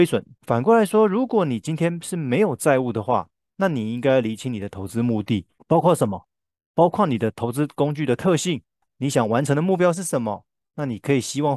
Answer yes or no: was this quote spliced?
no